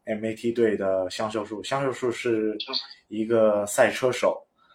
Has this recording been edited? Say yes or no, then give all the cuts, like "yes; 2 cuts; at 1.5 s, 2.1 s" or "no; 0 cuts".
no; 0 cuts